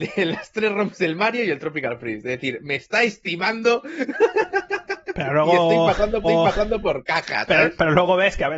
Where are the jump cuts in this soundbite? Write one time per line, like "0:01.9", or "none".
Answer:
0:06.2